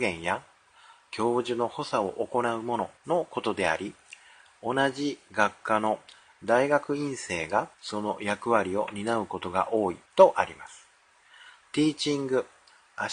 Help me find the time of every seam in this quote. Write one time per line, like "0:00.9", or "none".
0:03.0
0:07.7
0:10.1